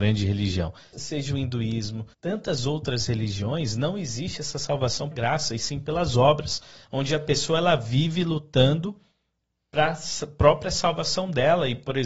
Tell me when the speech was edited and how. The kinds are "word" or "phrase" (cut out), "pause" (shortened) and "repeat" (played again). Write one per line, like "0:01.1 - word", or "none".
0:00.9 - word
0:02.1 - pause
0:05.1 - word